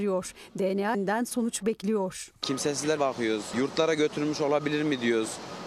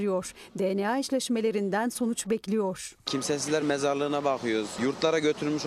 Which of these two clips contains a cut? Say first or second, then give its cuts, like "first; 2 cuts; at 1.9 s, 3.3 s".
first; 2 cuts; at 0.9 s, 3.0 s